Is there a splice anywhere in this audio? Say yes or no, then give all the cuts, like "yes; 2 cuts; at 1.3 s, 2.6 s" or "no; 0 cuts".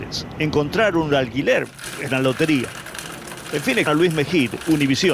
yes; 2 cuts; at 2.1 s, 3.9 s